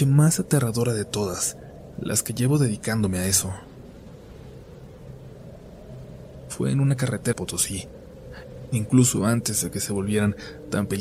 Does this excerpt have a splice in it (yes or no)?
yes